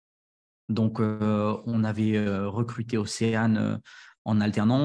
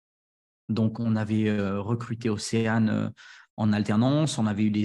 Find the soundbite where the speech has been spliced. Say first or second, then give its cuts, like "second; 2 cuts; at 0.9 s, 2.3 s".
second; 1 cut; at 0.9 s